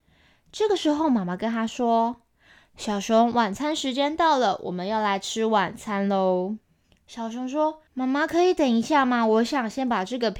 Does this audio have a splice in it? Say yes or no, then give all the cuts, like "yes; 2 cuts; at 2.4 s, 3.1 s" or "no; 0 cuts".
yes; 2 cuts; at 6.6 s, 7.9 s